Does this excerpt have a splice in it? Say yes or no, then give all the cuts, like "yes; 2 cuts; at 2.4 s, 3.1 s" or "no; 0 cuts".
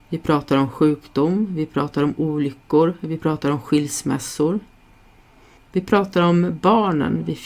no; 0 cuts